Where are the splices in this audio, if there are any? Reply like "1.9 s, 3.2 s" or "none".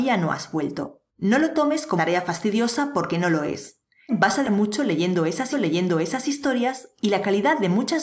1.1 s, 2.0 s, 4.1 s, 4.4 s, 5.5 s